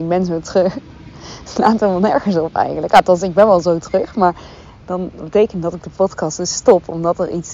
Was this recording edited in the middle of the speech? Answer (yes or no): no